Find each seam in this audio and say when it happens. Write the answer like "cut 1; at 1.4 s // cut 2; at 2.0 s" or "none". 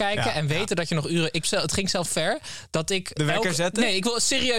cut 1; at 1.4 s // cut 2; at 2.1 s // cut 3; at 3.2 s

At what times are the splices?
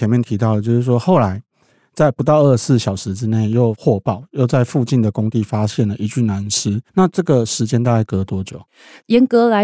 cut 1; at 6.9 s

